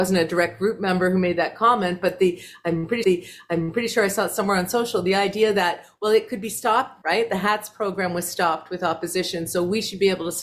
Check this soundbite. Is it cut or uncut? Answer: cut